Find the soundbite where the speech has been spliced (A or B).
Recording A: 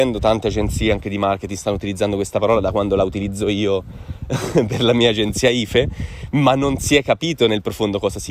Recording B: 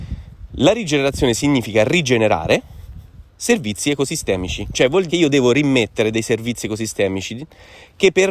B